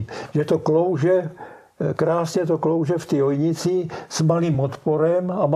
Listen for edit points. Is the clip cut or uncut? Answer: uncut